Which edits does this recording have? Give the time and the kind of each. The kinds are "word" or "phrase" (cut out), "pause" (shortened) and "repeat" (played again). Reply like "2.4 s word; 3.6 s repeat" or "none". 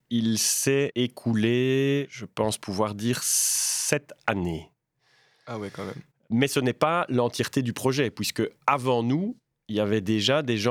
none